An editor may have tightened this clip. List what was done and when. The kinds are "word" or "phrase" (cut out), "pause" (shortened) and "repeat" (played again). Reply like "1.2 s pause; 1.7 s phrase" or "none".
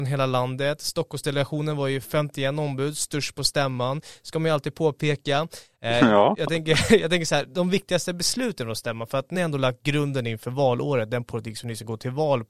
9.3 s word